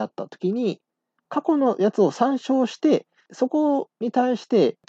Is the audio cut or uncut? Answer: cut